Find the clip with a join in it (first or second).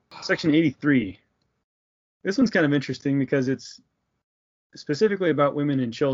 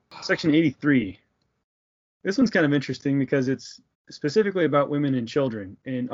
second